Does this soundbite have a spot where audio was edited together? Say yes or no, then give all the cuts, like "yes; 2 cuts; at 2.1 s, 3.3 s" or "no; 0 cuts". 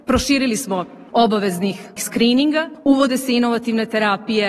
yes; 2 cuts; at 1.1 s, 2.0 s